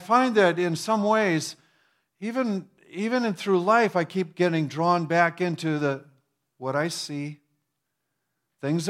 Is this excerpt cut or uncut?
uncut